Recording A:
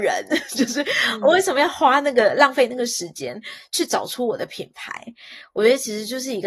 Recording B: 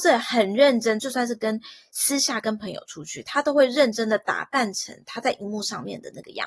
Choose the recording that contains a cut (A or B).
B